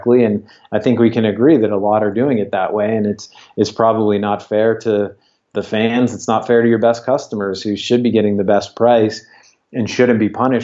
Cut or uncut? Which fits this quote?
uncut